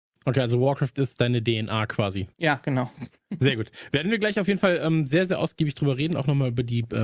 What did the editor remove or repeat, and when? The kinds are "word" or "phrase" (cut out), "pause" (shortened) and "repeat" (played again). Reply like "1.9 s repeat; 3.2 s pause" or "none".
2.3 s pause